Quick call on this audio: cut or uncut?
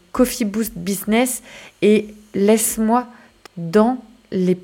cut